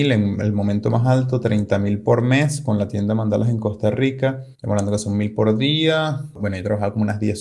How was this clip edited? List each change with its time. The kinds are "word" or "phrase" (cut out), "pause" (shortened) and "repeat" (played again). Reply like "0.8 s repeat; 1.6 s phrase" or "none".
none